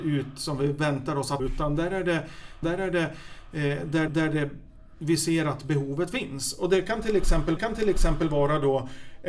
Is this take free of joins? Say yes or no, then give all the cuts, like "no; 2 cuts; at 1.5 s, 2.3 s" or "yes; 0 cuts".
no; 4 cuts; at 1.4 s, 2.6 s, 4.1 s, 7.6 s